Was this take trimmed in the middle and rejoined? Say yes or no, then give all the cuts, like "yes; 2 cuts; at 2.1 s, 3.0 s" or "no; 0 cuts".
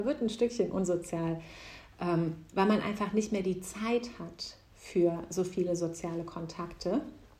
no; 0 cuts